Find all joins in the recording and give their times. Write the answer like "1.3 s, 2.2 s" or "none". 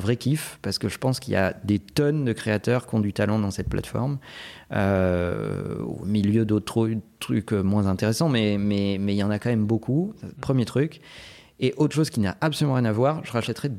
none